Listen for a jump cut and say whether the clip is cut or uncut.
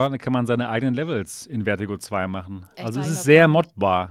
uncut